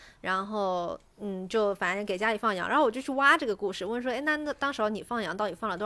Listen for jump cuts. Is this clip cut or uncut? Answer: uncut